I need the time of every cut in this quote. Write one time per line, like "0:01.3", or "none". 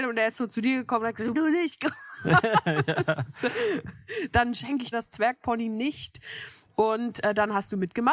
0:01.3
0:04.9

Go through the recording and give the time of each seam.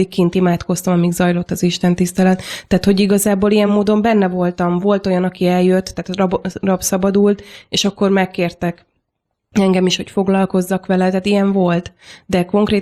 none

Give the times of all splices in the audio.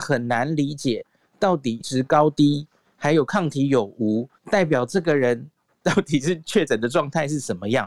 0:01.8
0:04.4

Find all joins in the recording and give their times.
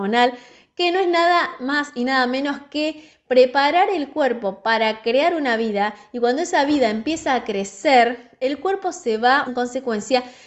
0:09.5

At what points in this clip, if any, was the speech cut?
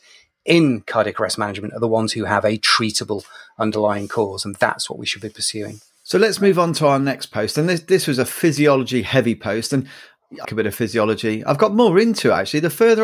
0:10.4

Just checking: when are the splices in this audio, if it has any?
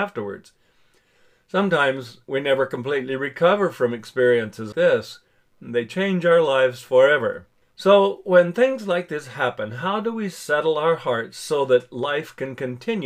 0:04.7
0:07.6

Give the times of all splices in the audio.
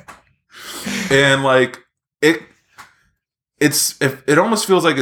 none

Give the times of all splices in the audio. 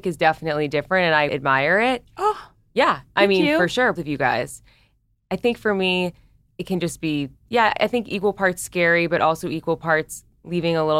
0:01.3
0:04.0

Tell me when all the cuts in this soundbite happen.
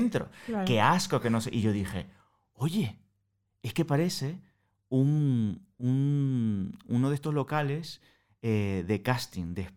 none

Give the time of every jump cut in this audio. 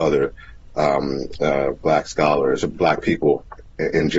none

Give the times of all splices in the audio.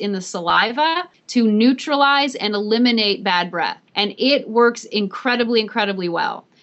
0:03.9

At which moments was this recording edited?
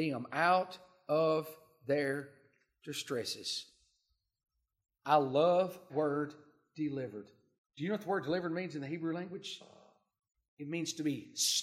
0:05.9
0:07.6

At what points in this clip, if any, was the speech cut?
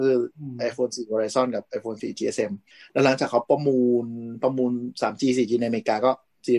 none

